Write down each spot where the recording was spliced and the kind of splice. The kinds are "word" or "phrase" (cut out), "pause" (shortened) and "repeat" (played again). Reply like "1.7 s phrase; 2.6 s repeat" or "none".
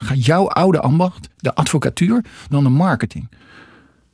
2.5 s phrase

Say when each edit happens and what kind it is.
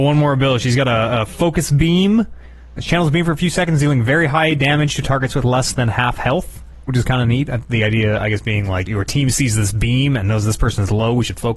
2.8 s word; 8.9 s word

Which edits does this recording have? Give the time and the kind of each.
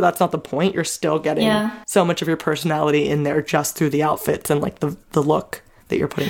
1.8 s pause

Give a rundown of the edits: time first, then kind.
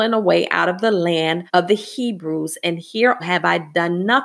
1.5 s pause; 3.2 s word

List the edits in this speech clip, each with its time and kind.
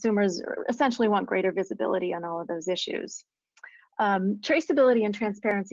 none

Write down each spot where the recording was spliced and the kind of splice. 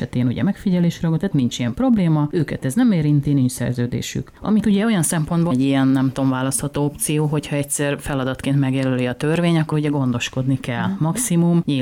1.3 s word; 4.6 s word; 5.5 s word; 9.7 s word

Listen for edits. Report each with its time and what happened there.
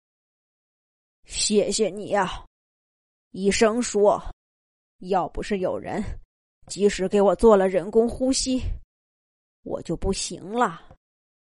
none

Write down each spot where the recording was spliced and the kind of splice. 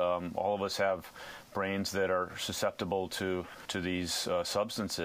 none

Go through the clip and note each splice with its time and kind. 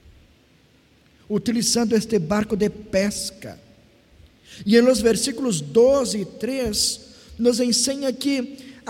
none

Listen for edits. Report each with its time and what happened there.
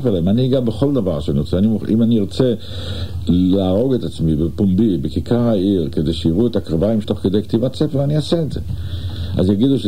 7.0 s word

